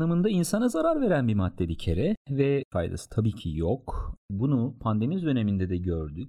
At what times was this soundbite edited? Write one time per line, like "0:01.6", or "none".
0:04.2